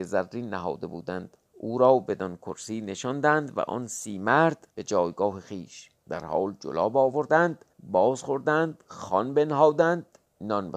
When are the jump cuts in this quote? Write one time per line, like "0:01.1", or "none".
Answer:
0:01.5
0:04.7
0:06.0
0:07.7